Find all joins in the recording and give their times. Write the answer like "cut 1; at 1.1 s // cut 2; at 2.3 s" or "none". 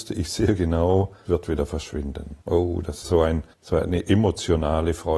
cut 1; at 1.3 s // cut 2; at 2.4 s // cut 3; at 3.0 s // cut 4; at 3.5 s